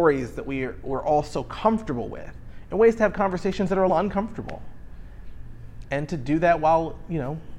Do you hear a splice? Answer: yes; 1 cut; at 3.9 s

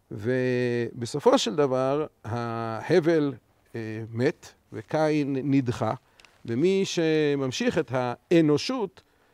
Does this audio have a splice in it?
no; 0 cuts

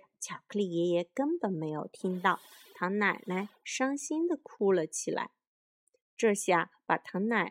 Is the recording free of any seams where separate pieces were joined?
yes; 0 cuts

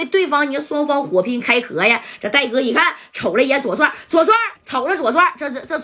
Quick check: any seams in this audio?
yes; 1 cut; at 4.6 s

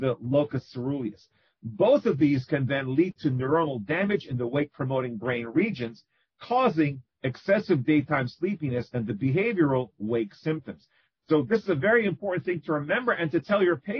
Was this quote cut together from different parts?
no; 0 cuts

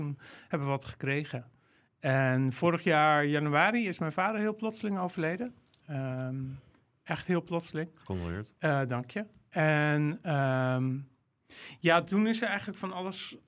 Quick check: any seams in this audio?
no; 0 cuts

